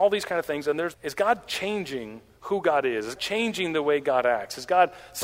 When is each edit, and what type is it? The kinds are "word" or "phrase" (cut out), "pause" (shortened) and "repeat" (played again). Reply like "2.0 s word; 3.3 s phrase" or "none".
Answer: 0.9 s phrase; 3.2 s word